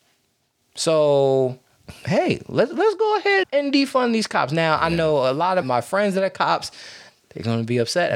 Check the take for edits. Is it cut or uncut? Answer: cut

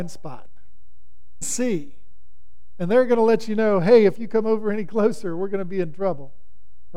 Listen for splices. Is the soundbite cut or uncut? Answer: cut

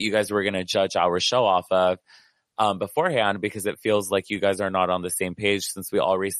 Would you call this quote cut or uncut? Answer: uncut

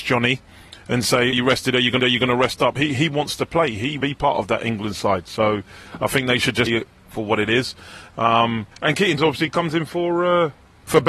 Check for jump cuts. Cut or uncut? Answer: cut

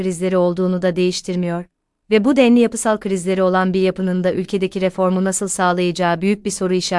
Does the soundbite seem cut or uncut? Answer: uncut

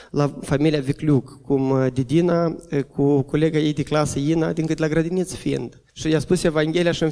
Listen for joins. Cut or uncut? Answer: cut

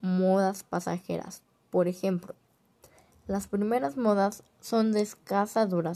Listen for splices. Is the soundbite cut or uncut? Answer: uncut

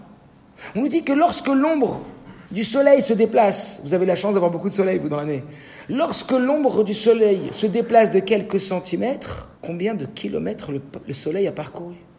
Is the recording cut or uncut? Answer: cut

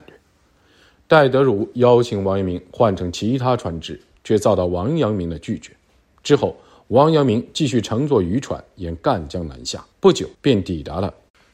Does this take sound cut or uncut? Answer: cut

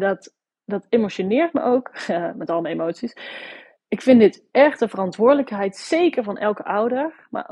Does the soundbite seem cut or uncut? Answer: uncut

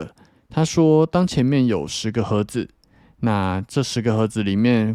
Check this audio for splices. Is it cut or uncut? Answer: uncut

